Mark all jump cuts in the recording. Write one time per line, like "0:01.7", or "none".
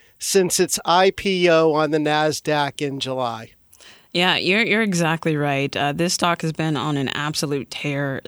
none